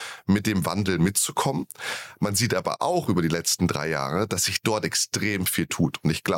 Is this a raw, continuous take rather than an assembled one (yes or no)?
yes